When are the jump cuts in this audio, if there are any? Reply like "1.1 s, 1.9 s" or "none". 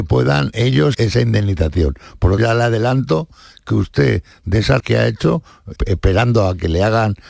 0.9 s, 2.4 s, 4.8 s, 5.8 s